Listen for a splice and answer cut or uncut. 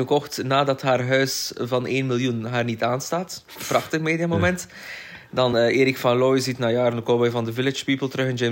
uncut